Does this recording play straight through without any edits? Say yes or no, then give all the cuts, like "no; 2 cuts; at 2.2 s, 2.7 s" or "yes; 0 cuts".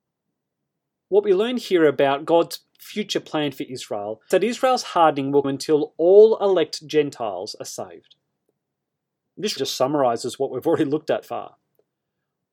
no; 4 cuts; at 4.3 s, 5.4 s, 9.6 s, 11.2 s